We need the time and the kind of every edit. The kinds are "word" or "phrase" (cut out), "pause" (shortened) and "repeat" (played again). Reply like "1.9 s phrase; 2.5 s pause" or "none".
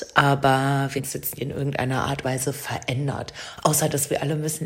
1.0 s word; 1.4 s word; 2.2 s word